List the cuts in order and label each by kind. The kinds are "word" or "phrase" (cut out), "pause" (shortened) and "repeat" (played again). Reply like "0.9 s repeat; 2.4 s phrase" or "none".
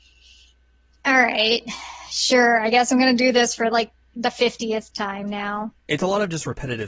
5.8 s pause